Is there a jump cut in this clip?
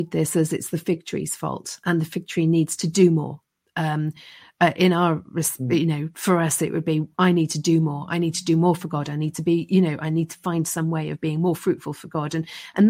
no; 0 cuts

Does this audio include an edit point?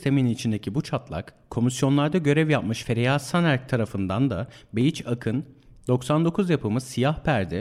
no; 0 cuts

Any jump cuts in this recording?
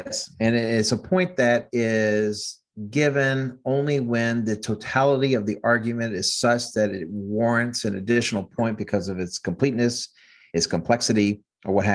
no; 0 cuts

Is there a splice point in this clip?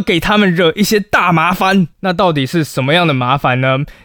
yes; 1 cut; at 1.9 s

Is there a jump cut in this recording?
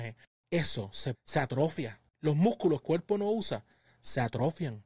yes; 3 cuts; at 1.1 s, 2.1 s, 2.8 s

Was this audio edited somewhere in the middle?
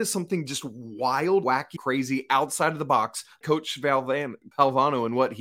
yes; 4 cuts; at 1.4 s, 1.8 s, 3.4 s, 4.5 s

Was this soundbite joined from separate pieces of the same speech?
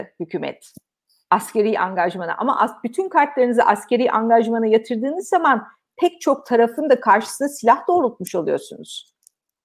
no; 0 cuts

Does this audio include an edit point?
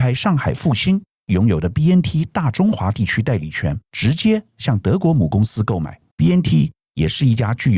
yes; 2 cuts; at 3.9 s, 6.1 s

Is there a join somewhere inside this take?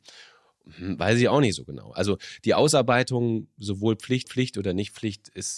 yes; 1 cut; at 4.2 s

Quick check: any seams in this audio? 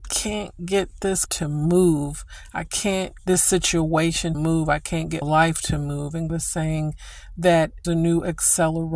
yes; 6 cuts; at 1.3 s, 3.2 s, 4.3 s, 5.2 s, 6.3 s, 7.8 s

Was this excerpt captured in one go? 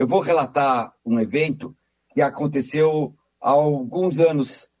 yes; 0 cuts

